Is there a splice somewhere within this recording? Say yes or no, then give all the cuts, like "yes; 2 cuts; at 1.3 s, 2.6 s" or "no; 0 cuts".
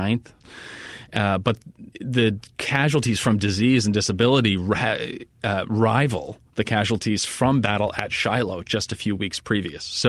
yes; 1 cut; at 1.9 s